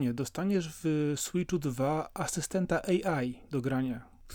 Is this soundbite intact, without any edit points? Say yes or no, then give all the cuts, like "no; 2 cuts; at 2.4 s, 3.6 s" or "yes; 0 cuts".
yes; 0 cuts